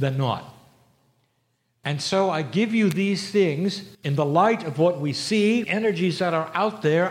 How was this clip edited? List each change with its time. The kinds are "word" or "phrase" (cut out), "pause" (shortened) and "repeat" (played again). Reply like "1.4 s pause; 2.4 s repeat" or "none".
3.9 s pause; 5.6 s word